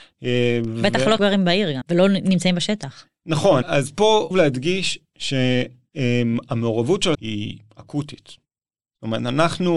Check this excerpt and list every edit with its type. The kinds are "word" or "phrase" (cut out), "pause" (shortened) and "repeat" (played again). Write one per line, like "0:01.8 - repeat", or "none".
0:01.2 - word
0:01.8 - word
0:03.6 - word
0:04.3 - word
0:07.1 - word